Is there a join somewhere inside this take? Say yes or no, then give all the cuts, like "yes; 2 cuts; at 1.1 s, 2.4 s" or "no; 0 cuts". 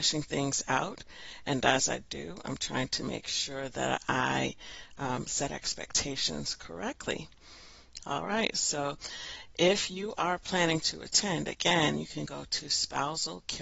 no; 0 cuts